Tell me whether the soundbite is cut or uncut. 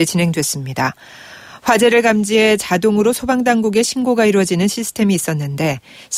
uncut